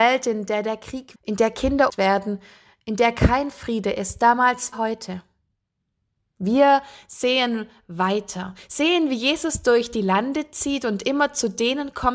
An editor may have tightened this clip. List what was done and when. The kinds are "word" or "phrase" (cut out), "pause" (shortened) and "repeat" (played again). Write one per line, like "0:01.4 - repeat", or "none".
0:01.1 - word
0:01.9 - word
0:04.7 - word